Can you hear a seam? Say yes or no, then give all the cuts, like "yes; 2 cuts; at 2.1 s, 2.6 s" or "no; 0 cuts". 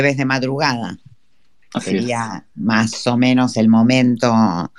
no; 0 cuts